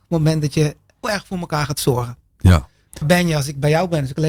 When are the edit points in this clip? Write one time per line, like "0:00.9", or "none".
0:01.0
0:03.0